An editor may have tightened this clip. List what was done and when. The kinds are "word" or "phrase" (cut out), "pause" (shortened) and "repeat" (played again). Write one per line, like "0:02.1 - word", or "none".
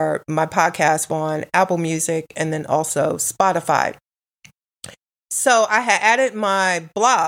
0:01.1 - phrase